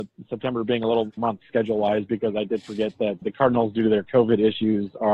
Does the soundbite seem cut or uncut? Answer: cut